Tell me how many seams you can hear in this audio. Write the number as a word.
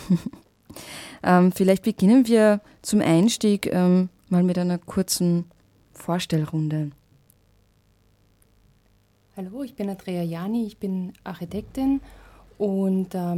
zero